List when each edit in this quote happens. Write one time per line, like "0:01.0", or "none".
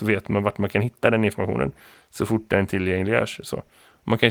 none

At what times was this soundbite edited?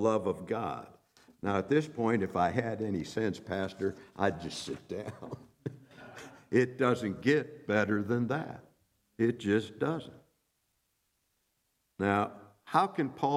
none

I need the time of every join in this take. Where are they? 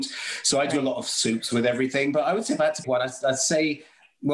0:02.8

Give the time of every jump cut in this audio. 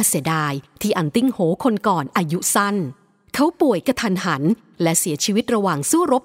none

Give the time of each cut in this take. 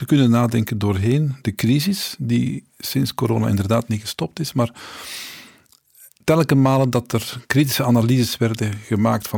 none

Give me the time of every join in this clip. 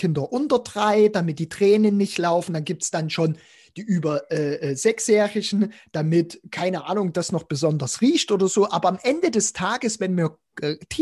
none

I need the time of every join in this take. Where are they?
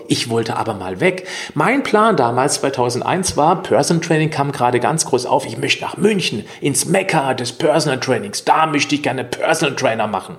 none

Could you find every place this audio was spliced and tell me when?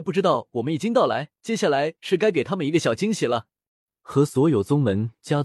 0:01.4
0:03.7

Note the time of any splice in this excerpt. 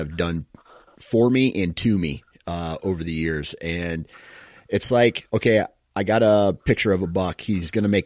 none

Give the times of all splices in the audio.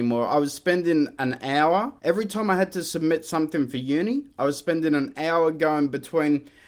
0:02.0

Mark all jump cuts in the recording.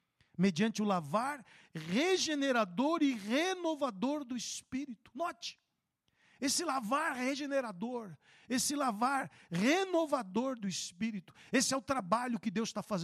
none

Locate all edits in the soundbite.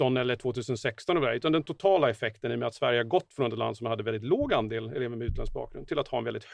none

